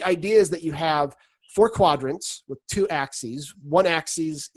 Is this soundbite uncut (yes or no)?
yes